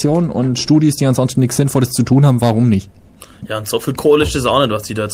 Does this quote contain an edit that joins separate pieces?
no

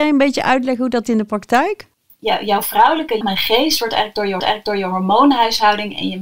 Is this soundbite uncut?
no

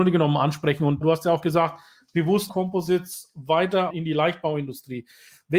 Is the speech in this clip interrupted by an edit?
yes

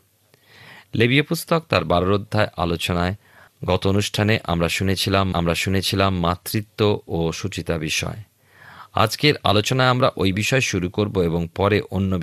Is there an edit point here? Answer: yes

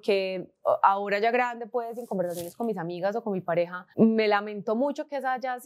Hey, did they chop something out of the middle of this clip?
yes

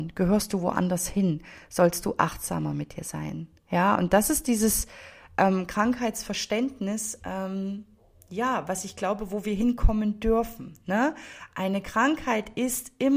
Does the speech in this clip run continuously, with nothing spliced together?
yes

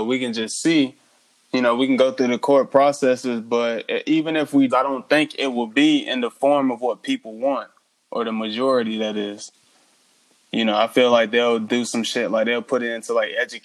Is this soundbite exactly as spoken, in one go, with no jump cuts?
no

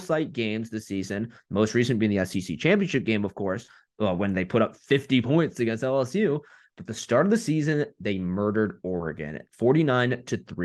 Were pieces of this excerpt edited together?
no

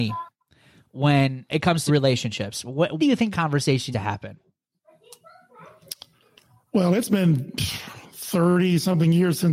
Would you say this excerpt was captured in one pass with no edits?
no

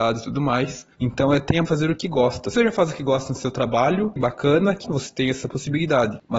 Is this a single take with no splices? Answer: no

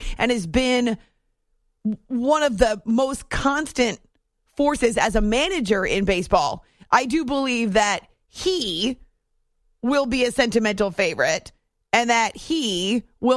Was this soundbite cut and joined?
no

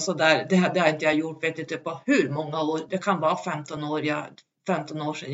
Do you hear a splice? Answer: no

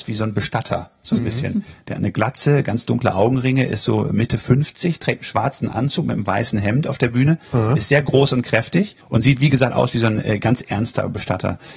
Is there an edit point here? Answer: yes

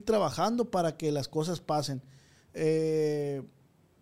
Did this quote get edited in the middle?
no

